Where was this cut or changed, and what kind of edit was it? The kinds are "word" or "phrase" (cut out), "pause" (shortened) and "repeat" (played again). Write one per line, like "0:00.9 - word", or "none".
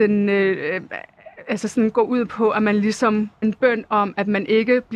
0:03.4 - word